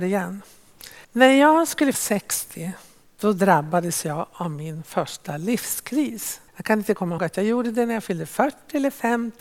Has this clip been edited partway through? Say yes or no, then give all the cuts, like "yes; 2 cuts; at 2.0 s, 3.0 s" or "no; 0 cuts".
yes; 4 cuts; at 1.0 s, 1.9 s, 6.5 s, 7.2 s